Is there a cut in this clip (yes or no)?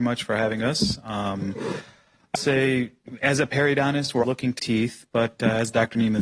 yes